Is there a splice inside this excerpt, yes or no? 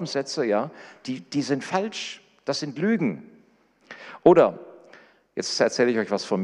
no